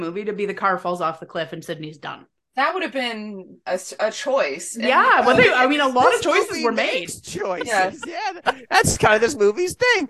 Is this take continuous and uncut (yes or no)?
yes